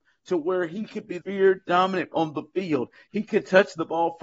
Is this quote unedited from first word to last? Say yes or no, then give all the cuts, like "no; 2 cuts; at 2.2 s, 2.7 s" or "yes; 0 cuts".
no; 2 cuts; at 1.2 s, 2.1 s